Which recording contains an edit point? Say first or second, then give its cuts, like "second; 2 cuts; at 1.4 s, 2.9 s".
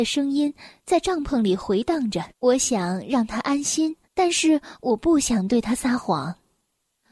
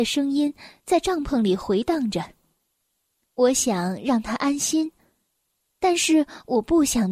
first; 2 cuts; at 2.3 s, 4.0 s